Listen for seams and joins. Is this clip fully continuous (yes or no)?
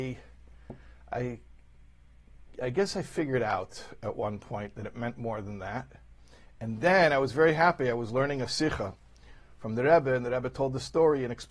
yes